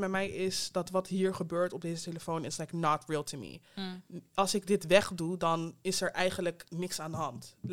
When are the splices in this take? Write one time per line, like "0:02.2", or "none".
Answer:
0:03.7